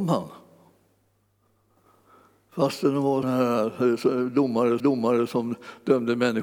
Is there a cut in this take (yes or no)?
yes